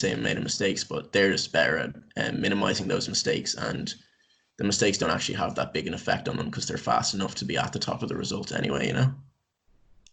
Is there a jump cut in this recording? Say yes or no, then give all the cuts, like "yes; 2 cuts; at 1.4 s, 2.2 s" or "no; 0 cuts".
no; 0 cuts